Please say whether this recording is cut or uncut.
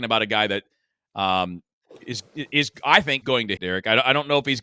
cut